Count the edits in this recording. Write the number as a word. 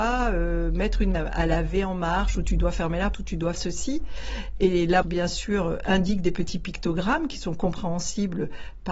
four